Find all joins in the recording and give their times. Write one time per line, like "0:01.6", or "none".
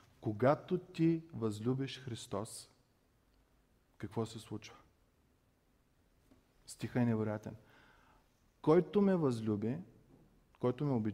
none

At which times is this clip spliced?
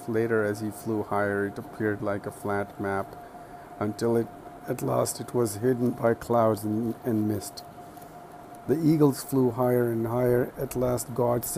none

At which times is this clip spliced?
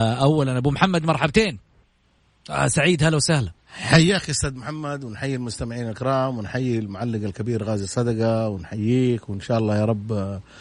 0:02.0
0:03.6

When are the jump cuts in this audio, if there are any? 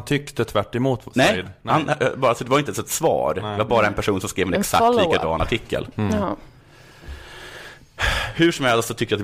none

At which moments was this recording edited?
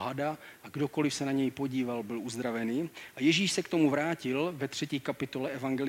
none

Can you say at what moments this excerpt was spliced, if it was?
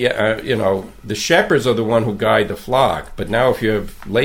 none

